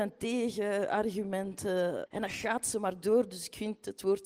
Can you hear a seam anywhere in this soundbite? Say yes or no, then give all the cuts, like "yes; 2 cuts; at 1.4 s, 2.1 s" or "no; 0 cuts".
yes; 1 cut; at 2.1 s